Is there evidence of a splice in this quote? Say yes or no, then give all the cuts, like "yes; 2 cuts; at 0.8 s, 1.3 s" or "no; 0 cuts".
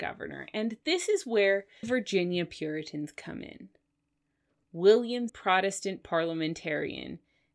yes; 2 cuts; at 1.8 s, 5.3 s